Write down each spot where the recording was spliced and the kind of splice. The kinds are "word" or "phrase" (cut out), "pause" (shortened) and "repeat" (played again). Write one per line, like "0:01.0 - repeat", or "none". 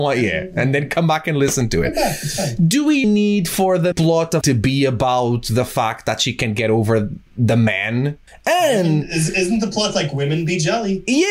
0:03.0 - word
0:03.9 - word
0:04.4 - phrase
0:07.3 - pause
0:08.3 - pause